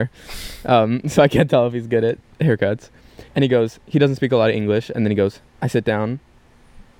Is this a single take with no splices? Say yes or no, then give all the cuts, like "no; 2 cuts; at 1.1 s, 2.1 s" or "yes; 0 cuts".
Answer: no; 2 cuts; at 3.3 s, 5.5 s